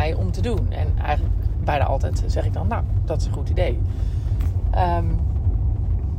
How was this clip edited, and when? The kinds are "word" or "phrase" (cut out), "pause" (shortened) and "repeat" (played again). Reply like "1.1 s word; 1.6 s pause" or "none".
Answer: none